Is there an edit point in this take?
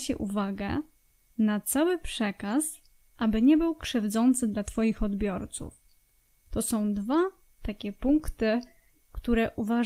no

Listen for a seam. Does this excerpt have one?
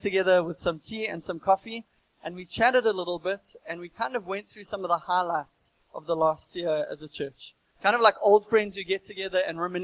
no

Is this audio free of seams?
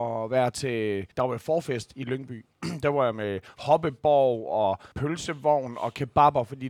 no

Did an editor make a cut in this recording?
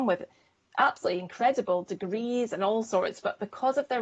no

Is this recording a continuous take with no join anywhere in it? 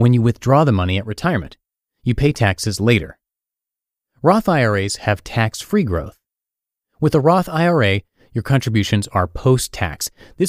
yes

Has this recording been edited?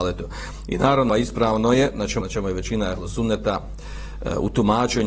yes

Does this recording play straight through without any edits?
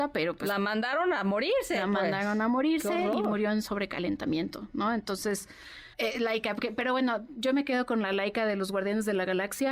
no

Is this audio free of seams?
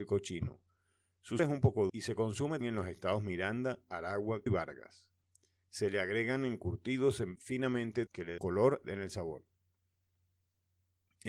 no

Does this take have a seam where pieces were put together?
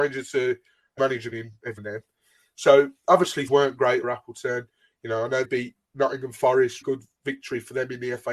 yes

